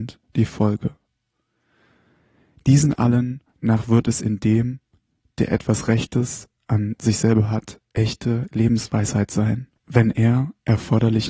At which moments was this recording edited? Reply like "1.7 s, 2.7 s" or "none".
9.8 s